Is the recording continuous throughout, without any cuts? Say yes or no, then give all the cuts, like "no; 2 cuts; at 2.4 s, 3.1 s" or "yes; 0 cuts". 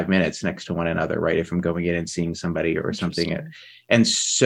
yes; 0 cuts